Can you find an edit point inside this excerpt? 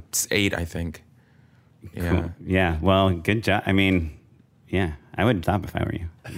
yes; 1 cut; at 5.4 s

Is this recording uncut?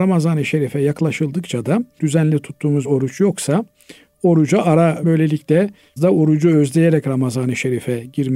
no; 4 cuts; at 2.0 s, 2.8 s, 5.0 s, 6.0 s

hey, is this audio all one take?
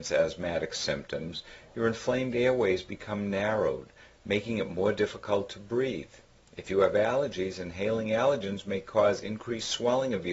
yes; 0 cuts

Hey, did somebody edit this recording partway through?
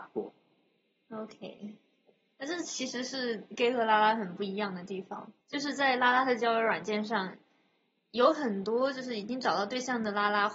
yes; 1 cut; at 5.4 s

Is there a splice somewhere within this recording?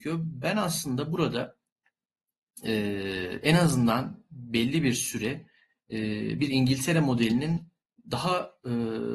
no; 0 cuts

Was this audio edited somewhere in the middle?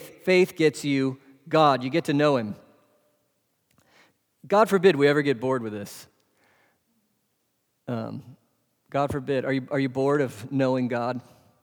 no; 0 cuts

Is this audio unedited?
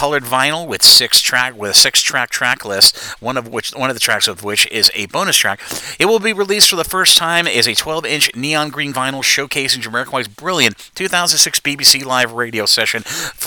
no; 1 cut; at 8.9 s

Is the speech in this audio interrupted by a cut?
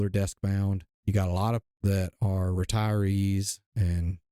yes; 2 cuts; at 0.9 s, 1.6 s

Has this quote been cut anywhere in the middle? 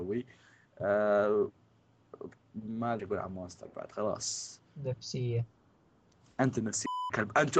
yes; 2 cuts; at 2.4 s, 3.0 s

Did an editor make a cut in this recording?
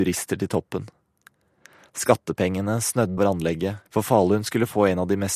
yes; 2 cuts; at 3.2 s, 3.9 s

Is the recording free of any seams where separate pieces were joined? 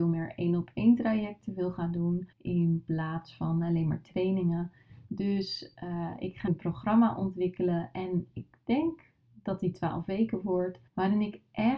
no; 3 cuts; at 2.3 s, 6.5 s, 10.9 s

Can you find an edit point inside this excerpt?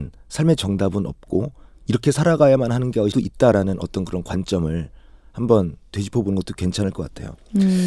yes; 1 cut; at 3.1 s

